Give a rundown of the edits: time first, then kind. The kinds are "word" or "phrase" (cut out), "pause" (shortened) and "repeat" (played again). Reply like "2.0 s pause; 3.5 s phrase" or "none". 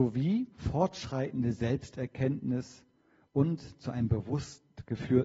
none